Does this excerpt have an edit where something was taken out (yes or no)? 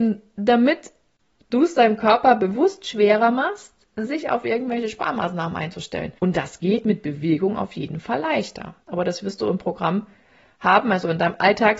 yes